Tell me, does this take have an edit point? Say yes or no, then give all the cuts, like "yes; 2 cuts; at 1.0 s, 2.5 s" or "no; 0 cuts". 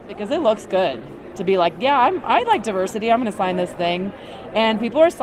no; 0 cuts